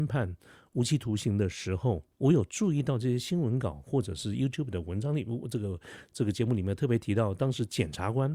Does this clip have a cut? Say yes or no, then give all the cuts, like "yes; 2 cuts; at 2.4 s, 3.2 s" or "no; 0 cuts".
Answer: yes; 1 cut; at 2.1 s